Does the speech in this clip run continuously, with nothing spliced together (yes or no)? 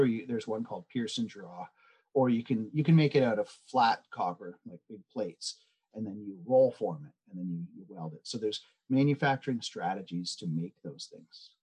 yes